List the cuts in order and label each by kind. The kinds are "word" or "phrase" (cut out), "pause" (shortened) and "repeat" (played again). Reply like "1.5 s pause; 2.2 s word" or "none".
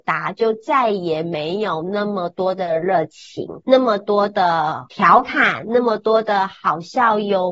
3.6 s pause